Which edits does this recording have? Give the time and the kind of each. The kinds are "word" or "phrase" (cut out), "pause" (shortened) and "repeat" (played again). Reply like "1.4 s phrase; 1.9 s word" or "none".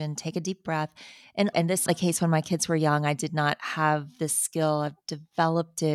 1.5 s word; 1.9 s phrase

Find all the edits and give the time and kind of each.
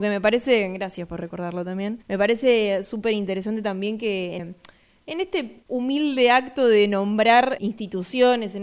2.0 s pause; 4.4 s word; 5.6 s pause; 7.6 s word

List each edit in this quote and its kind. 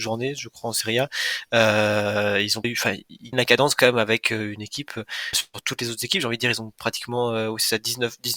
2.6 s word; 3.3 s word; 5.3 s word

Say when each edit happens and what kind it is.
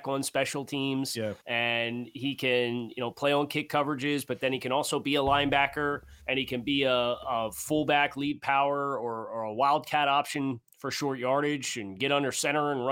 1.4 s pause; 6.2 s pause; 10.7 s pause

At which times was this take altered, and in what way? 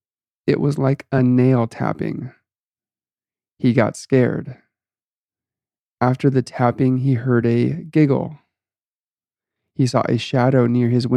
none

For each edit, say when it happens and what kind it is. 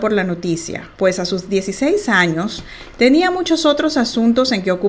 0.9 s pause

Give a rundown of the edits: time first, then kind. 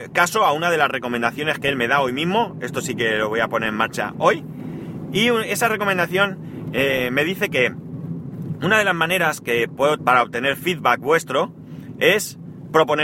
10.0 s word

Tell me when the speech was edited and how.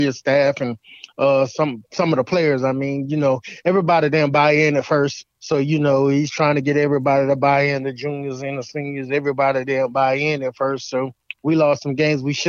5.3 s pause

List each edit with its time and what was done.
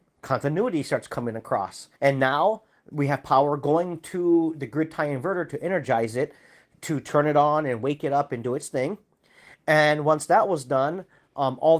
2.0 s pause

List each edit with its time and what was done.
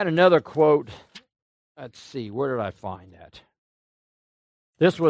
none

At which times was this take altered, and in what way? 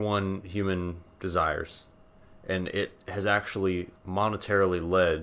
4.0 s pause

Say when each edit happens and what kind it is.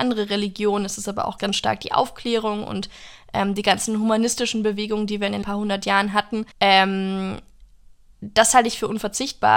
1.4 s word; 5.4 s word; 6.5 s pause

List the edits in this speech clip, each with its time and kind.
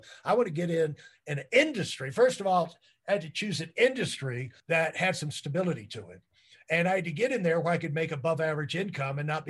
4.6 s pause

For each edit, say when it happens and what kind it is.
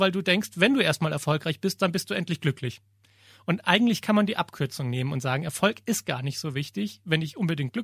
none

